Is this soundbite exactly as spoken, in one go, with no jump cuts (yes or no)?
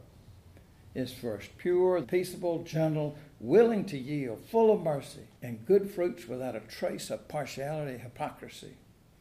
no